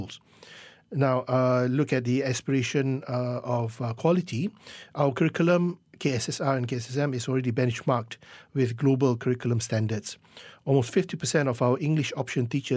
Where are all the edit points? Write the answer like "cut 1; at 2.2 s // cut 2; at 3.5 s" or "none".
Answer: none